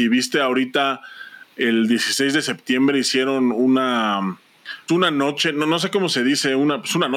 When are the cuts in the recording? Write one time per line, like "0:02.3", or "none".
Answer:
0:04.9